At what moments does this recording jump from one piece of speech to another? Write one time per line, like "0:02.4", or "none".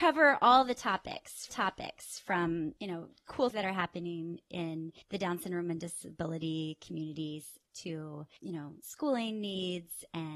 0:01.5
0:03.5
0:05.0
0:08.8